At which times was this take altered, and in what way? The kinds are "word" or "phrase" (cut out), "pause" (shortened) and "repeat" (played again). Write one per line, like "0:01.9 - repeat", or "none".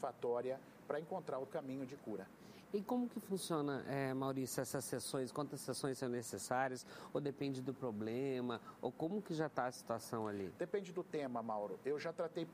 0:01.5 - word

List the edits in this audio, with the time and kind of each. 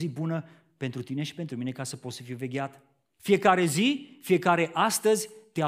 none

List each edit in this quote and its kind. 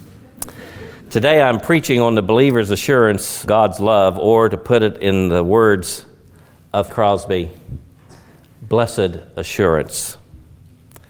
0:01.0 - pause
0:03.5 - word
0:06.9 - word

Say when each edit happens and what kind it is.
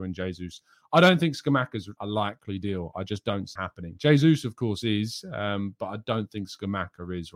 0:02.0 - word
0:03.6 - word

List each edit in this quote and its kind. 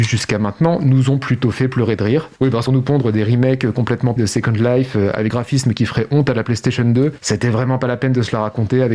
0:02.4 - pause
0:02.7 - phrase
0:04.2 - word
0:05.3 - word

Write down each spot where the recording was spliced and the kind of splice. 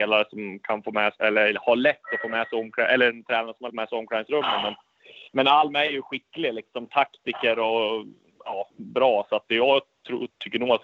0:01.1 - word
0:03.7 - phrase
0:05.3 - pause

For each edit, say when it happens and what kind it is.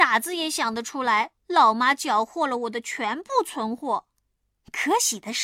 0:01.4 - pause
0:04.4 - pause

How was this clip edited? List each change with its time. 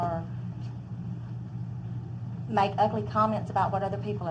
none

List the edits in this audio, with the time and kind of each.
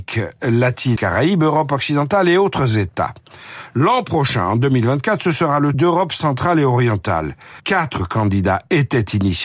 0:01.0 - word
0:05.7 - phrase
0:07.6 - pause

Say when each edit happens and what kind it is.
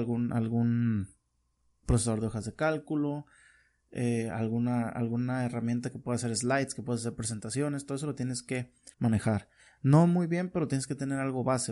0:01.8 - word
0:08.9 - pause

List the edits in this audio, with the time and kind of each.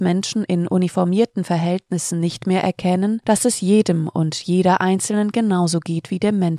none

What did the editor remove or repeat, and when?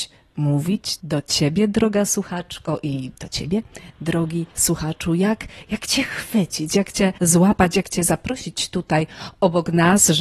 0:04.5 - pause
0:07.2 - pause

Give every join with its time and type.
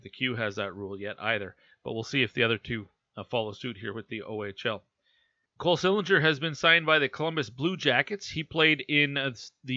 none

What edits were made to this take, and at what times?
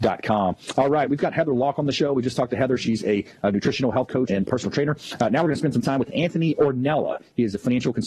0:04.3 - word

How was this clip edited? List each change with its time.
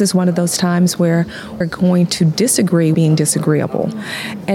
0:01.6 - word
0:02.9 - word

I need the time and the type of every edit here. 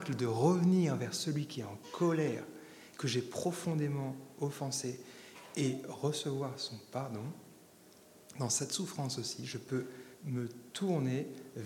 0:10.1 - pause

